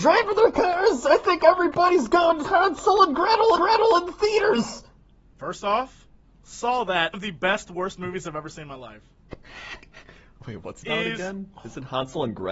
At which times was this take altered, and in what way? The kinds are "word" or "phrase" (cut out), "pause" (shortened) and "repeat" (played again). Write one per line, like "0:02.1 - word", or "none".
0:02.4 - word
0:03.6 - repeat
0:07.1 - phrase
0:10.8 - word